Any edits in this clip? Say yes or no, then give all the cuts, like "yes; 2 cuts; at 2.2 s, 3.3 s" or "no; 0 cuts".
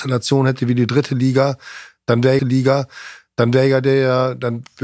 yes; 1 cut; at 2.4 s